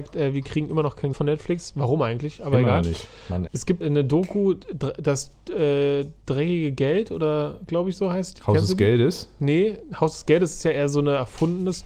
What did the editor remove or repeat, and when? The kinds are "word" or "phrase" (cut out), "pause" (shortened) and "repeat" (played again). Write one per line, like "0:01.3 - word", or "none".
0:01.1 - word
0:03.5 - word
0:03.8 - word